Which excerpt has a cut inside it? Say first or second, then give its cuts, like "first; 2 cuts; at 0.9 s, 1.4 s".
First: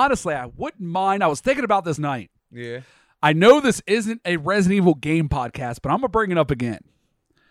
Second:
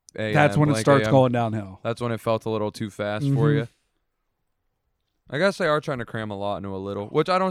first; 2 cuts; at 2.0 s, 2.4 s